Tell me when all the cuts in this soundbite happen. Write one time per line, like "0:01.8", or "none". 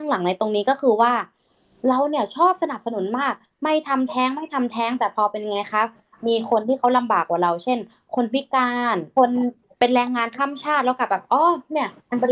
none